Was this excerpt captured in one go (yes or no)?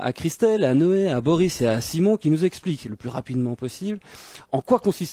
yes